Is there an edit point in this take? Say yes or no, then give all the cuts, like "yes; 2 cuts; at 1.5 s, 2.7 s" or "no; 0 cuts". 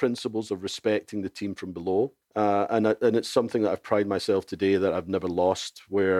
yes; 1 cut; at 2.2 s